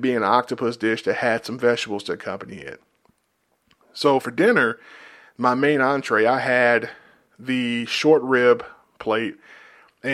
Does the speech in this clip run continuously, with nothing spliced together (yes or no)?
yes